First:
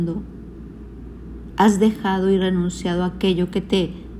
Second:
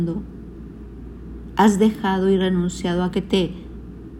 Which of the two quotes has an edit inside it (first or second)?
second